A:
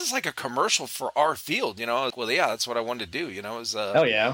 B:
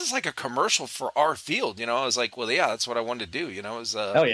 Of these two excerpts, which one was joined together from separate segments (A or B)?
A